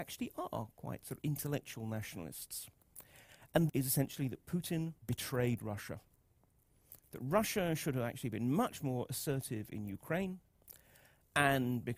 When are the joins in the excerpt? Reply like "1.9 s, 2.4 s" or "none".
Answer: 3.7 s, 5.0 s